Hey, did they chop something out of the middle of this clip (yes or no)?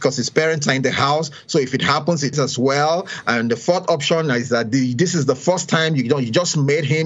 yes